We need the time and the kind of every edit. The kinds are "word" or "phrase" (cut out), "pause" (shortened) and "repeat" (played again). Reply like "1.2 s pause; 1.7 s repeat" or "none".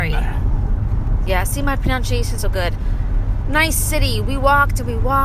2.4 s word